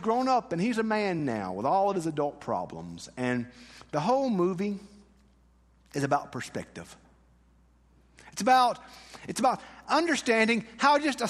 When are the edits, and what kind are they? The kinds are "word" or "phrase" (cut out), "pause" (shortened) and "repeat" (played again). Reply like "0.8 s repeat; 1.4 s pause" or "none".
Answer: none